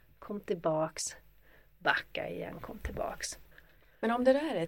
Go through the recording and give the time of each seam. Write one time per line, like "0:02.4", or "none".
none